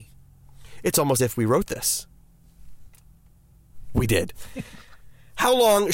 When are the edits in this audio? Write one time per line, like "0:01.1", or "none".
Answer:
0:01.2